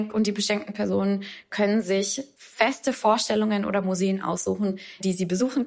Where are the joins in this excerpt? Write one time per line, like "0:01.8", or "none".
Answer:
none